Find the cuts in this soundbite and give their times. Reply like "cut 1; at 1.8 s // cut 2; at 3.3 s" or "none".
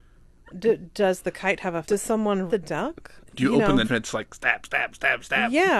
cut 1; at 1.8 s // cut 2; at 2.5 s // cut 3; at 3.8 s